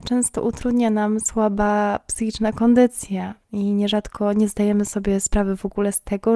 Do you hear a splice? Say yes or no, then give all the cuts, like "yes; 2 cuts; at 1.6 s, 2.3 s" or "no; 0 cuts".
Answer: no; 0 cuts